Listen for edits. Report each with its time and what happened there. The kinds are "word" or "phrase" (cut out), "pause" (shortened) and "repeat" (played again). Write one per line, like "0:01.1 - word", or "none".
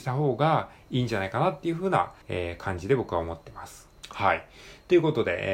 0:02.2 - pause
0:04.0 - pause